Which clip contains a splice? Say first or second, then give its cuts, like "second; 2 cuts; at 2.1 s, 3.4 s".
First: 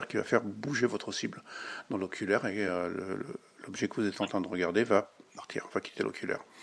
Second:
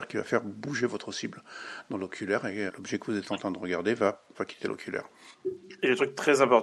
second; 2 cuts; at 2.7 s, 4.3 s